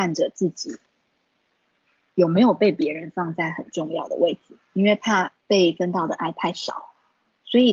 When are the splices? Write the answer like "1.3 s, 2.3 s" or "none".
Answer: 5.4 s